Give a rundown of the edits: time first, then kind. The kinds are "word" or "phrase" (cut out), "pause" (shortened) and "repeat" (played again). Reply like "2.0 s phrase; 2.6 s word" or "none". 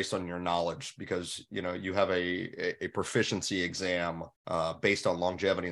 4.4 s pause